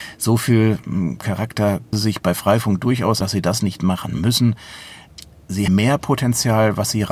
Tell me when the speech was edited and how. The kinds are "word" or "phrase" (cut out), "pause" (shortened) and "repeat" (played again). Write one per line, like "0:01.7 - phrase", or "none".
0:01.9 - word
0:03.2 - word
0:05.7 - word